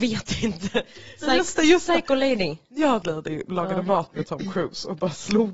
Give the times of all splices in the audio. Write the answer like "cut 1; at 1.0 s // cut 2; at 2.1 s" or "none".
cut 1; at 3.0 s